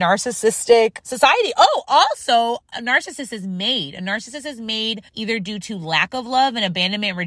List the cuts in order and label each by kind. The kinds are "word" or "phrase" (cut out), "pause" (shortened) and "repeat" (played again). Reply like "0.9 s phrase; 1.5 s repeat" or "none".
1.0 s word; 2.7 s word; 5.1 s pause